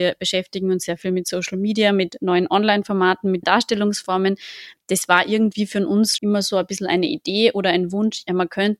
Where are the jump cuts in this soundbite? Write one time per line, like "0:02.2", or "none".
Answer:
0:03.4
0:06.2